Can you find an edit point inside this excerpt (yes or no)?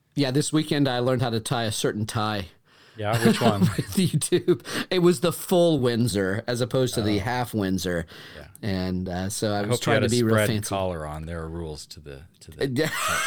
no